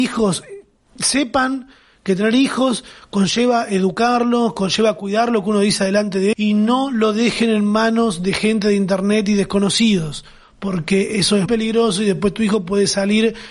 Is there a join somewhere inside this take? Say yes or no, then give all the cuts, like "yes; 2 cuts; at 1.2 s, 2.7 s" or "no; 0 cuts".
yes; 2 cuts; at 6.3 s, 11.5 s